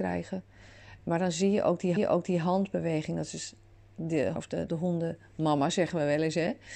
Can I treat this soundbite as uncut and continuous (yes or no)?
no